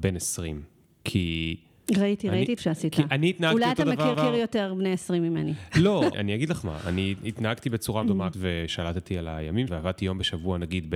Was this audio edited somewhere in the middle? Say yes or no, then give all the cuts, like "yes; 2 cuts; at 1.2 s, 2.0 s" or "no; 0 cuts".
yes; 6 cuts; at 2.6 s, 4.1 s, 6.1 s, 8.0 s, 8.3 s, 9.7 s